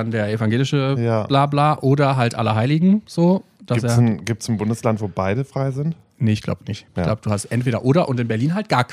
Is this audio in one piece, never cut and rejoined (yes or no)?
yes